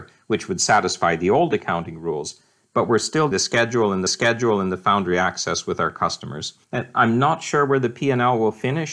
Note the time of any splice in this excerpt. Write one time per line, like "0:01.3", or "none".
0:03.3
0:04.1
0:06.6

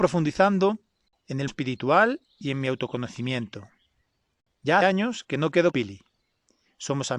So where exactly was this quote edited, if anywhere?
0:01.5
0:04.8
0:05.7

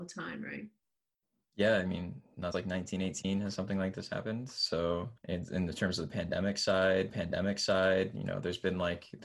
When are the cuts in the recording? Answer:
0:02.5
0:05.2
0:07.1

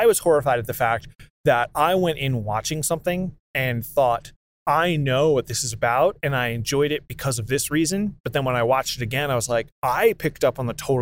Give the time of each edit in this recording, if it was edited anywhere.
none

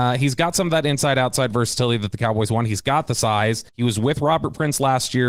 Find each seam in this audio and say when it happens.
0:03.7

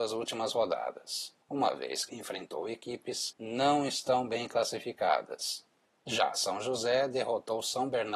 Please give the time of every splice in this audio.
0:02.1
0:03.3

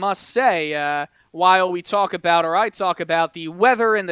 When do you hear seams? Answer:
none

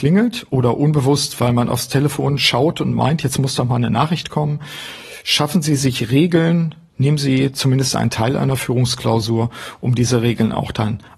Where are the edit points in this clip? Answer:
none

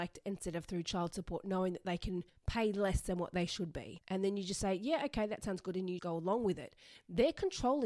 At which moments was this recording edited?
0:02.3
0:06.0

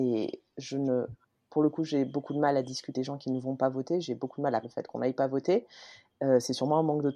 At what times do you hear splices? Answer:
0:01.2
0:02.9
0:04.6

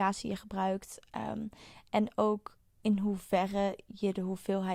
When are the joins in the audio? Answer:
none

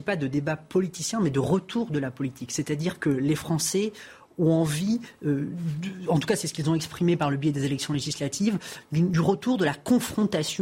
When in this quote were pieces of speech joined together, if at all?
none

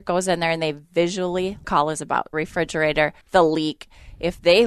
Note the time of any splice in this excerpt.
0:01.6
0:02.3
0:03.2

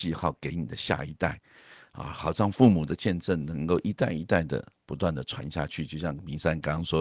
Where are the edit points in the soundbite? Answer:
none

